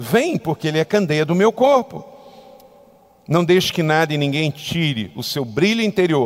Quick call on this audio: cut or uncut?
uncut